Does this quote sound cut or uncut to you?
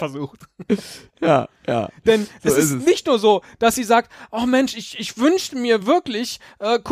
uncut